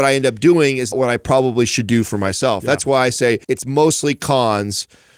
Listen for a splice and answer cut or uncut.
cut